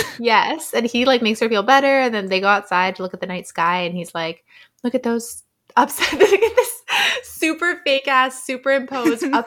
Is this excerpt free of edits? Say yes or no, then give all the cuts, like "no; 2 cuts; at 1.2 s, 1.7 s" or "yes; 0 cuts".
yes; 0 cuts